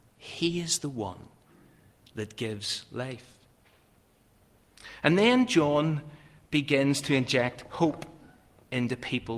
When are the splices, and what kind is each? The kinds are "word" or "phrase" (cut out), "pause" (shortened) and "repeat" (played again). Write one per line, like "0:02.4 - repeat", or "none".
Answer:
none